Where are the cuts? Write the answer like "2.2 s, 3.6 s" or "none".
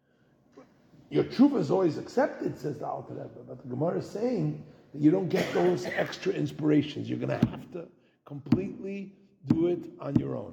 none

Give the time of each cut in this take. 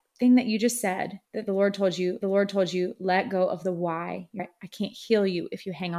1.3 s, 2.2 s, 4.4 s

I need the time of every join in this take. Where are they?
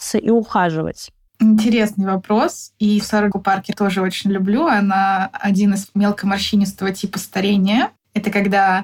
1.3 s, 3.3 s, 3.7 s, 5.9 s

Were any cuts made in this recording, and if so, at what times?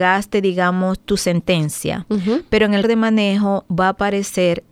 2.8 s

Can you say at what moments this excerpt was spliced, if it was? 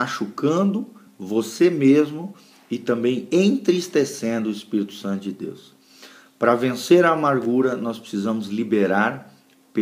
none

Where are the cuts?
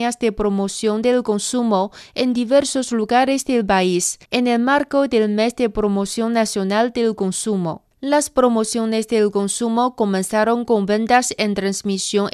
4.2 s, 7.9 s

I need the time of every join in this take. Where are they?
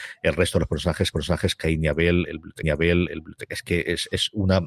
1.1 s, 2.6 s

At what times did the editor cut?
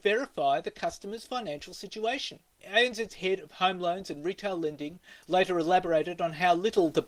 2.5 s

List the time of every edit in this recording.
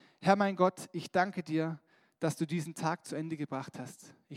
none

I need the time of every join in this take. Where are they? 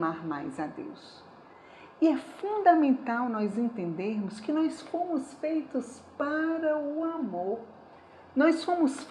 none

